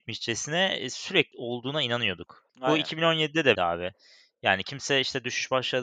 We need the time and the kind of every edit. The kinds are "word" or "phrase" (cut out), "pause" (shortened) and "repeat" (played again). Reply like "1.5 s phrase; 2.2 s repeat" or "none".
1.3 s word; 2.5 s pause; 3.6 s word